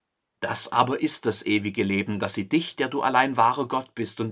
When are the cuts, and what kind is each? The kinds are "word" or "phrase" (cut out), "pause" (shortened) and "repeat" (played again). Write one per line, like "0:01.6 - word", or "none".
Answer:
none